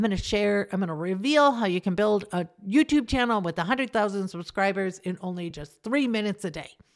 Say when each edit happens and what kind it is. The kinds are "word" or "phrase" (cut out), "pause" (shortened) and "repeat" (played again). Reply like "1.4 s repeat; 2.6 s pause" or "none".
none